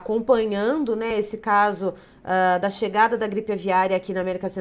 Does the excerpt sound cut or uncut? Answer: uncut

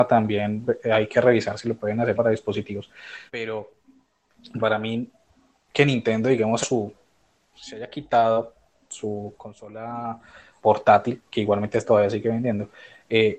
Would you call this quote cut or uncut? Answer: cut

